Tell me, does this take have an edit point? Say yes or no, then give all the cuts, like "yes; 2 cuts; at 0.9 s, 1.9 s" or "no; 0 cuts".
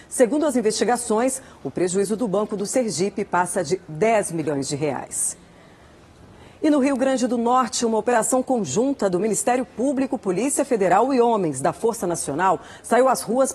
no; 0 cuts